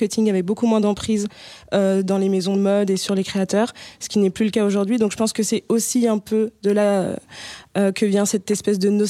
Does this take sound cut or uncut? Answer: uncut